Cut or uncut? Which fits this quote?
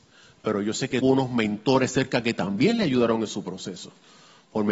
cut